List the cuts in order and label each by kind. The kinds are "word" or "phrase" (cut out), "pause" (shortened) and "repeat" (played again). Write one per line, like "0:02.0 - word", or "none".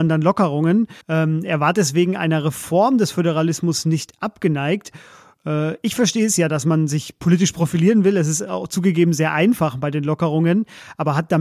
0:01.0 - pause